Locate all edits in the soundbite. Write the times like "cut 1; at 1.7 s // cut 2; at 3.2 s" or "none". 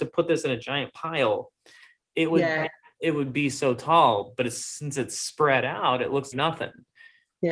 cut 1; at 6.3 s

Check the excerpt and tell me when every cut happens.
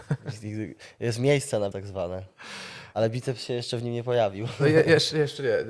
cut 1; at 1.7 s

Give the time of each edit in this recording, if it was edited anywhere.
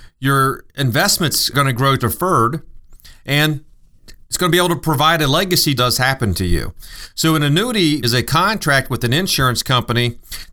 cut 1; at 1.5 s // cut 2; at 2.0 s // cut 3; at 5.8 s // cut 4; at 8.0 s

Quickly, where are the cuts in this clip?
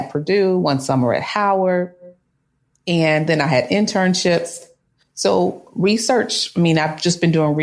none

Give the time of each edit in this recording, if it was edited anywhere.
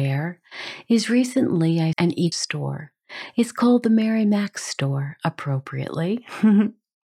cut 1; at 1.9 s // cut 2; at 2.3 s

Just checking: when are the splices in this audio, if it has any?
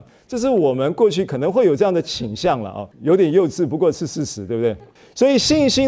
cut 1; at 2.9 s // cut 2; at 5.0 s

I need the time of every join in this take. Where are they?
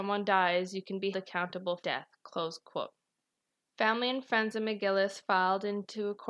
cut 1; at 1.1 s // cut 2; at 1.8 s // cut 3; at 3.4 s

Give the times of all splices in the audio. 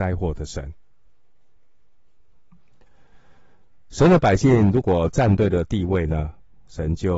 none

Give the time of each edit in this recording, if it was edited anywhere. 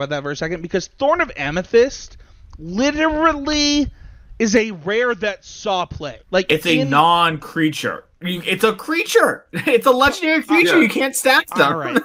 cut 1; at 6.2 s

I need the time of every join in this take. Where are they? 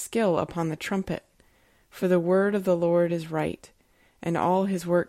none

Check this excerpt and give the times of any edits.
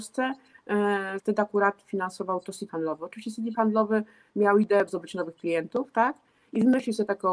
cut 1; at 1.2 s // cut 2; at 2.7 s // cut 3; at 3.5 s // cut 4; at 4.9 s

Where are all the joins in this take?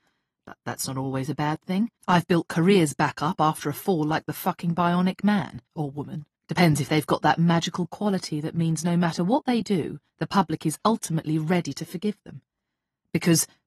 cut 1; at 2.0 s // cut 2; at 5.7 s // cut 3; at 6.4 s // cut 4; at 10.1 s

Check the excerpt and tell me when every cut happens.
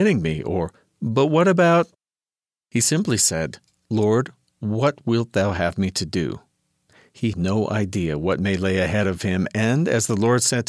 cut 1; at 7.3 s

